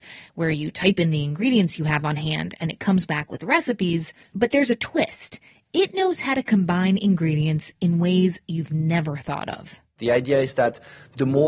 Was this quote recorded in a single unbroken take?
yes; 0 cuts

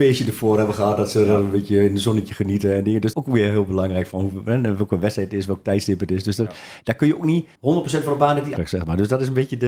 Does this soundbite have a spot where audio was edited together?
yes; 3 cuts; at 3.1 s, 7.6 s, 8.6 s

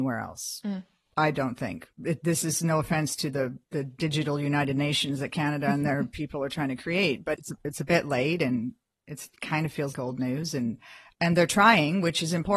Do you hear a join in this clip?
yes; 5 cuts; at 1.9 s, 3.6 s, 7.4 s, 9.9 s, 11.1 s

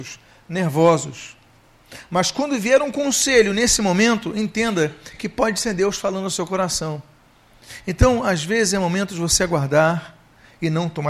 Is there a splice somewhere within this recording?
no; 0 cuts

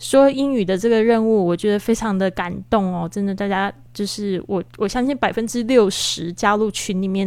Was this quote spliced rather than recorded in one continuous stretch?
yes; 1 cut; at 4.7 s

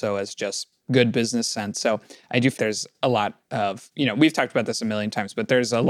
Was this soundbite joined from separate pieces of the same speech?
yes; 1 cut; at 2.6 s

